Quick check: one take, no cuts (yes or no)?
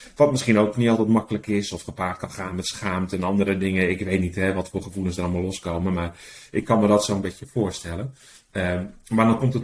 yes